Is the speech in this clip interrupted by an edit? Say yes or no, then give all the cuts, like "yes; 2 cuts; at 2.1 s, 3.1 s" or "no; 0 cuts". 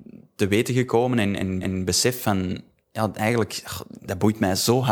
yes; 1 cut; at 1.6 s